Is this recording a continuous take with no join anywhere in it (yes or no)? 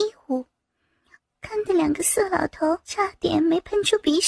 no